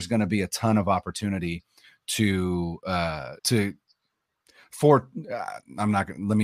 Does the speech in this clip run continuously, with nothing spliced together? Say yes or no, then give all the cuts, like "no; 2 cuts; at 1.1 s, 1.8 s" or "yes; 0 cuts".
no; 1 cut; at 3.4 s